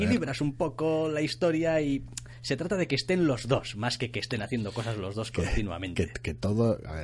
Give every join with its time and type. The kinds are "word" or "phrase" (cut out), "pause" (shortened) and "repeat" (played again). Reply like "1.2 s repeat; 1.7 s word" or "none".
none

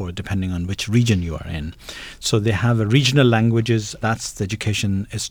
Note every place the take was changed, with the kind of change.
4.0 s word

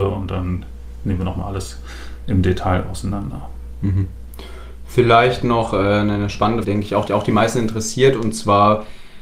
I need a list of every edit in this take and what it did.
6.6 s phrase; 7.1 s repeat

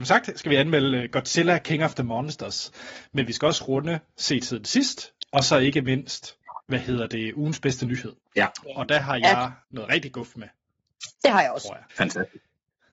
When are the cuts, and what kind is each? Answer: 6.6 s pause; 8.2 s pause; 9.6 s pause; 11.1 s pause; 11.9 s pause

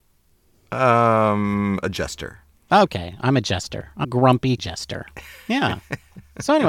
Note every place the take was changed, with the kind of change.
4.0 s word; 4.6 s word

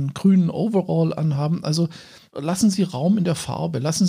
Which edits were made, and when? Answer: 2.3 s word

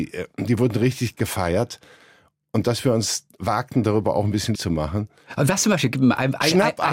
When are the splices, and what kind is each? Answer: 4.6 s word

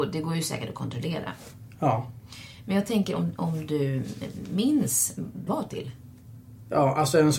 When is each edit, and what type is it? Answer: 5.5 s phrase

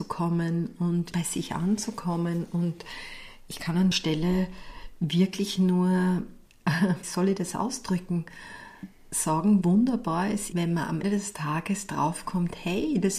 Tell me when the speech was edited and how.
1.1 s word; 3.9 s word; 7.0 s word; 9.6 s word; 10.5 s word; 11.0 s word

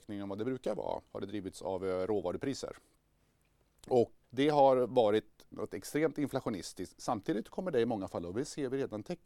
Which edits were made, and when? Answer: 1.1 s pause; 4.2 s word; 5.5 s word

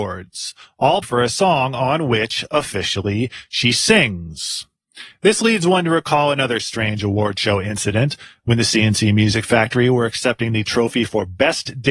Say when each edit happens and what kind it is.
1.0 s word

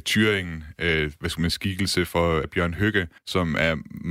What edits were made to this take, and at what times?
1.5 s phrase; 2.4 s phrase; 3.2 s pause

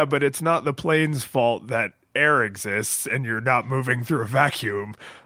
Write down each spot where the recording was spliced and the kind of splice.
none

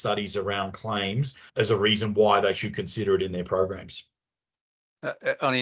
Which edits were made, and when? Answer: 1.5 s pause

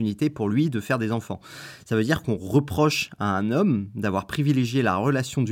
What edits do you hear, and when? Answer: none

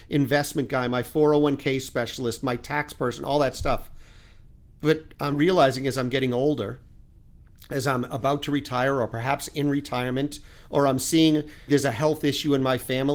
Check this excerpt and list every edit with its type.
5.3 s word; 11.7 s word

